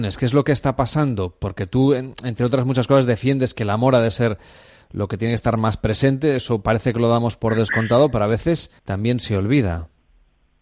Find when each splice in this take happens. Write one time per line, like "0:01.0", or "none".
0:08.8